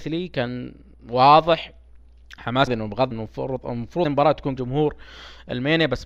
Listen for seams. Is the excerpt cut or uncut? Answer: cut